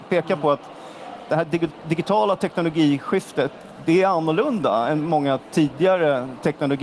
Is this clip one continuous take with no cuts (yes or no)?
yes